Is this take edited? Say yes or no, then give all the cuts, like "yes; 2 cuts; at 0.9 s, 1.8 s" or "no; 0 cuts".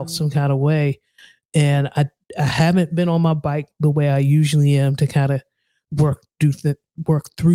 no; 0 cuts